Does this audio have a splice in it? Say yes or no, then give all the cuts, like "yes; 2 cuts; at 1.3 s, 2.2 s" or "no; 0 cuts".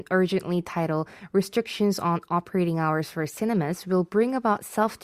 no; 0 cuts